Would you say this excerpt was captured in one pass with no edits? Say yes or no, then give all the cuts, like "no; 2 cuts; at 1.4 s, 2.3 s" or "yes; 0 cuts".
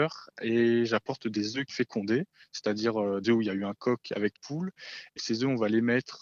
no; 4 cuts; at 1.7 s, 3.2 s, 4.3 s, 5.2 s